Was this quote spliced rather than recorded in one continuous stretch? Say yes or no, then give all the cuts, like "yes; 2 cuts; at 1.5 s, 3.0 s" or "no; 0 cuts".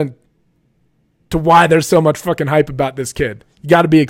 no; 0 cuts